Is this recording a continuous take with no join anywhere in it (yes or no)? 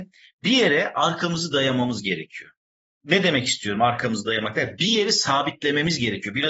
yes